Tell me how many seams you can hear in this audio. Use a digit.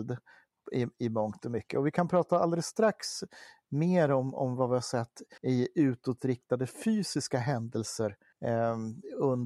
2